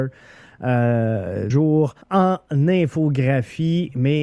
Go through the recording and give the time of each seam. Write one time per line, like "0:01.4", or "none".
0:01.5
0:02.0